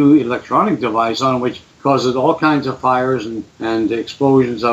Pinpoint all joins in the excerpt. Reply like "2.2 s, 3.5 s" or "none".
1.7 s, 3.5 s